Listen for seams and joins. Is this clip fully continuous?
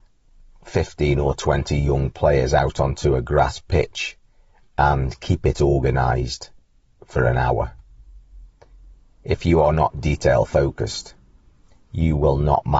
yes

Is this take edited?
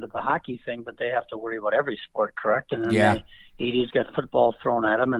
no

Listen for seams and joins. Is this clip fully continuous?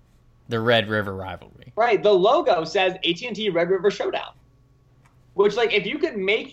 yes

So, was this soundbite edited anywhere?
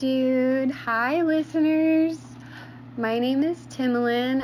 no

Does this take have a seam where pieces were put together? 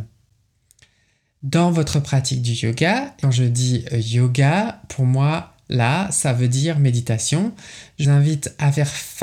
yes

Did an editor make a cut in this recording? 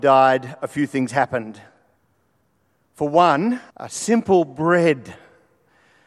yes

